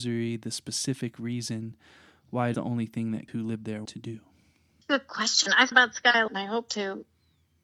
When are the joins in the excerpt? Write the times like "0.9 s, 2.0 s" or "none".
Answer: 2.5 s, 3.3 s, 3.9 s, 4.8 s, 5.7 s, 6.3 s